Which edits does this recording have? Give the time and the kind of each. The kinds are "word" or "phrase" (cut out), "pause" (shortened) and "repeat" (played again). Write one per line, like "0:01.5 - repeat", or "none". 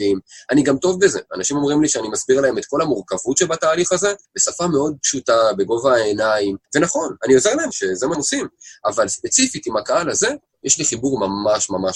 0:04.2 - pause
0:06.6 - pause
0:07.7 - phrase
0:08.1 - word